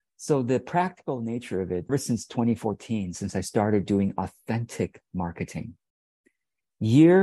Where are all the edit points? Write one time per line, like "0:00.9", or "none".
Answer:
0:01.9